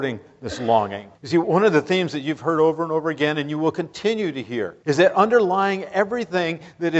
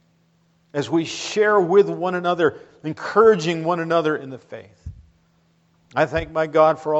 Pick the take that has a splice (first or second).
first